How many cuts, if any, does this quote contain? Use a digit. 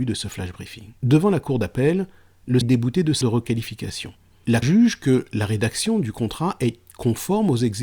4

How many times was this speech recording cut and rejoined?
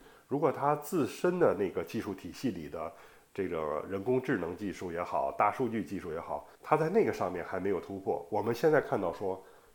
1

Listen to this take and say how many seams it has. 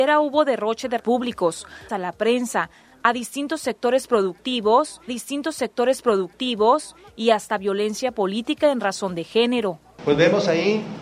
3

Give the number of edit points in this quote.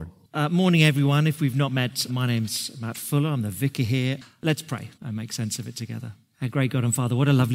2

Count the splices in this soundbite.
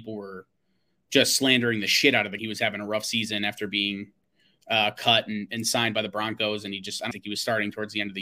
2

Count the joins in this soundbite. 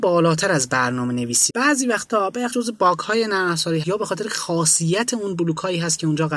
3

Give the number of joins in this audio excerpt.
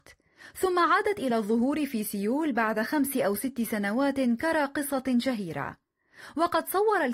0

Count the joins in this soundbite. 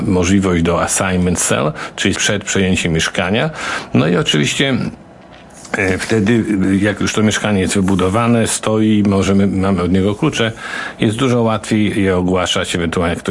1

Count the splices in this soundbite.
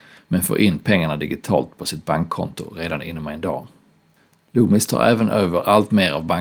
0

